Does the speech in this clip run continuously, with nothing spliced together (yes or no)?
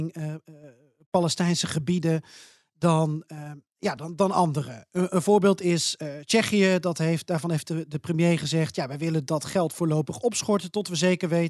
yes